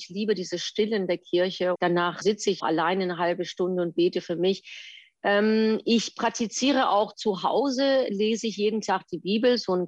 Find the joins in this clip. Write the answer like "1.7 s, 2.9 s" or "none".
1.7 s, 2.2 s, 2.6 s